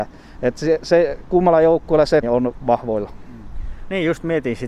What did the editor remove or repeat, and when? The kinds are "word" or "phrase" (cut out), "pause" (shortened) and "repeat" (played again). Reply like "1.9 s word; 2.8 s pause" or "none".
2.2 s phrase